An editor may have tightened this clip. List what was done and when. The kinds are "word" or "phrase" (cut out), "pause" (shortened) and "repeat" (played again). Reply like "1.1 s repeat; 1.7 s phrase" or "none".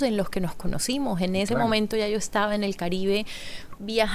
none